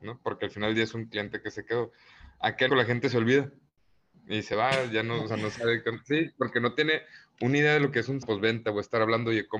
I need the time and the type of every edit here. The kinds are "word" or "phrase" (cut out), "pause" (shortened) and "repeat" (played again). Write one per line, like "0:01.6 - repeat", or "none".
0:02.7 - word
0:08.2 - word